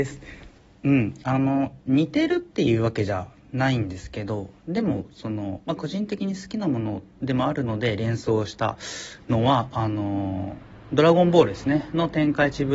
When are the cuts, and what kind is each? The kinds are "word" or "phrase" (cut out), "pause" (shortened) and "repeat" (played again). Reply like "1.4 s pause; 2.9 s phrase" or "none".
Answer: 7.1 s pause